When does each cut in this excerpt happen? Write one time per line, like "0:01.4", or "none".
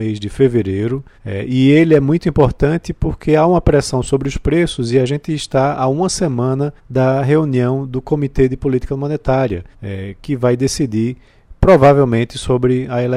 0:01.1
0:06.8
0:09.7